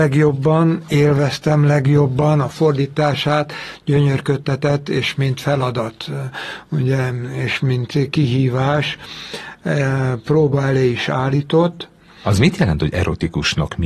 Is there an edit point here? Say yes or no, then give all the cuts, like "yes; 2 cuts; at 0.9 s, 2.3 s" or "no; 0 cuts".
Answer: no; 0 cuts